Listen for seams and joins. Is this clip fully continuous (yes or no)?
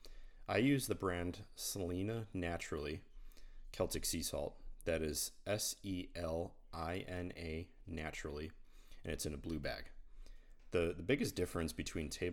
yes